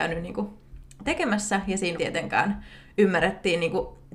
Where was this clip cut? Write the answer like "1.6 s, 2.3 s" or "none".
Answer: 1.1 s, 2.0 s

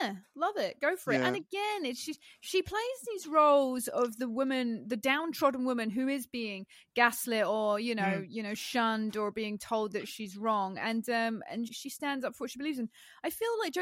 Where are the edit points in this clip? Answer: 11.7 s

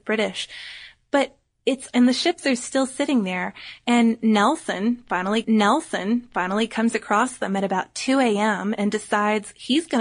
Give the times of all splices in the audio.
1.9 s, 5.4 s

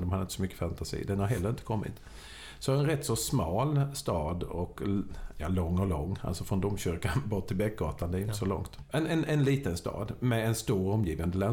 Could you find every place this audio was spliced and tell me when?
none

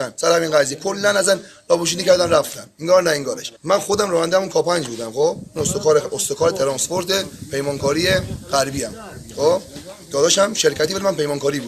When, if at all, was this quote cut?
3.6 s

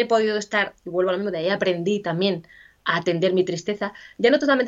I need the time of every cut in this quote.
none

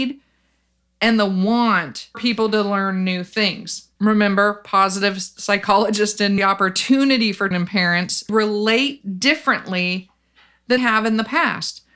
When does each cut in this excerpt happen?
2.1 s, 4.0 s, 6.4 s, 7.5 s, 8.3 s, 10.8 s

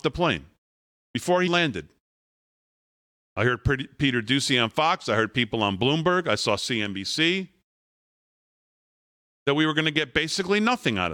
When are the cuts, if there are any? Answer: 1.5 s

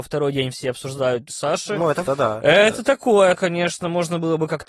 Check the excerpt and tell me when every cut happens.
1.3 s, 2.1 s, 3.4 s

